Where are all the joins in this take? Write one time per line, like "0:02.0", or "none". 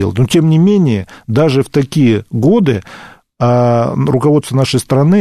none